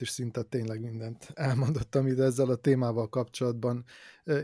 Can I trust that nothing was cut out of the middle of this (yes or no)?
yes